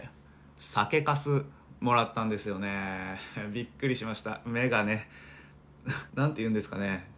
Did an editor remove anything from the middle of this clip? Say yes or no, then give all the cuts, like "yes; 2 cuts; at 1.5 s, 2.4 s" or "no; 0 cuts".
yes; 1 cut; at 6.1 s